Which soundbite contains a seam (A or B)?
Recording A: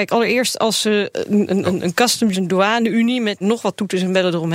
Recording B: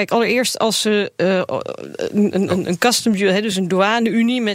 A